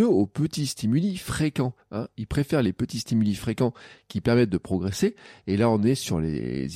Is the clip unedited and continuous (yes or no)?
yes